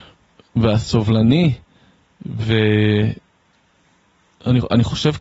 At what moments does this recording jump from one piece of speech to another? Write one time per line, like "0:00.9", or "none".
none